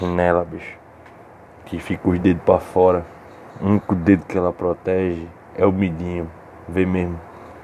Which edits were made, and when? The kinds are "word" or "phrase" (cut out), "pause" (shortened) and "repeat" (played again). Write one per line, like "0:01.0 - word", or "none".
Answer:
none